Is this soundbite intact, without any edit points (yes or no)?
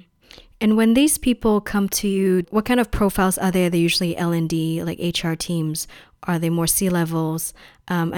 yes